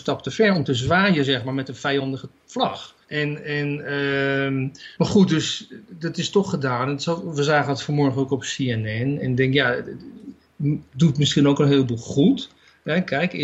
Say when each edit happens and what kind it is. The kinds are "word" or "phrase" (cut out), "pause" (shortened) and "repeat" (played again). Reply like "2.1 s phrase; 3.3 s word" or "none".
3.0 s pause; 4.9 s pause